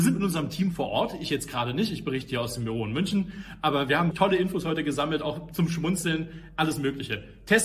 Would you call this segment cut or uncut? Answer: cut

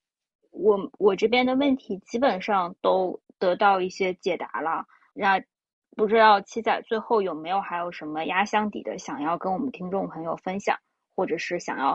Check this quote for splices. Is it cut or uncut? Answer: cut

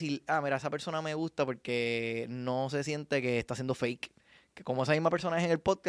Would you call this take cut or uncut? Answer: uncut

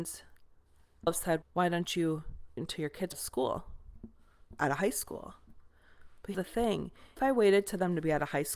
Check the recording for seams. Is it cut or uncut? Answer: cut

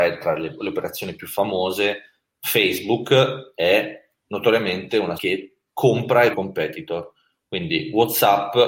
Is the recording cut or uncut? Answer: cut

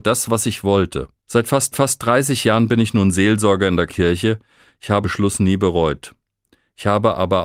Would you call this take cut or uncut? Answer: cut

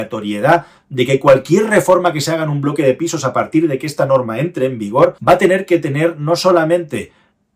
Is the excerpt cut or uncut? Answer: cut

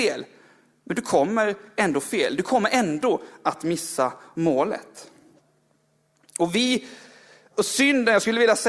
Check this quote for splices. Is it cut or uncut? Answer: uncut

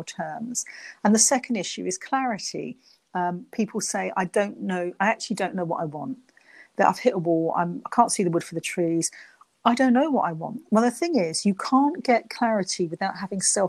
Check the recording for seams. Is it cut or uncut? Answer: uncut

